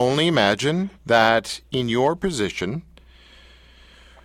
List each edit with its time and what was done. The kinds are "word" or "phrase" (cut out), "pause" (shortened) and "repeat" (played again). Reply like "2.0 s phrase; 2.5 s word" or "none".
1.0 s pause